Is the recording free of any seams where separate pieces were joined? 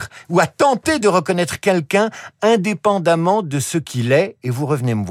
yes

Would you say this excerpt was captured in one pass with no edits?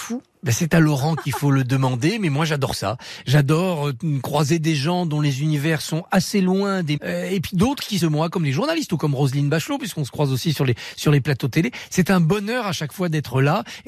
no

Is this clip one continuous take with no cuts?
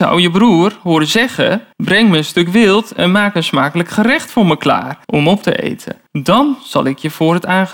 no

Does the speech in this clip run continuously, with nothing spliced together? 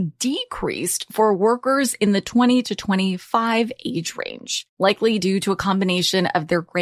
yes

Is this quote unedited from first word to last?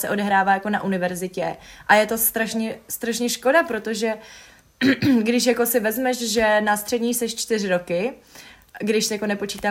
yes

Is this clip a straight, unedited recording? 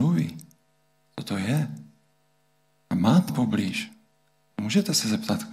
no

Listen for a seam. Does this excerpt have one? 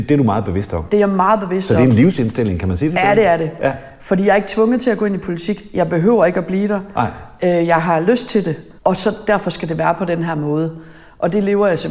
yes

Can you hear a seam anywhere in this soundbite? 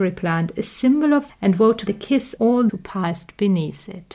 yes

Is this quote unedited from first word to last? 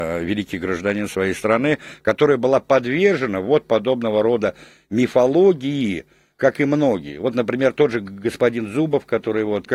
yes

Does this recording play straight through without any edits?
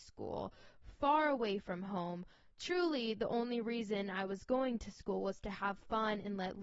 yes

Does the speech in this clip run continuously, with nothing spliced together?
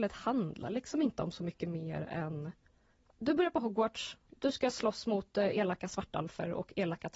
yes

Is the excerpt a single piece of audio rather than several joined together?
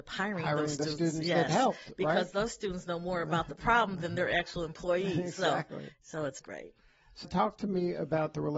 no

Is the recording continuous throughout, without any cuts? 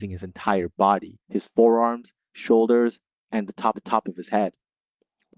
no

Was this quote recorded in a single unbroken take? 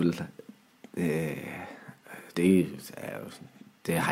no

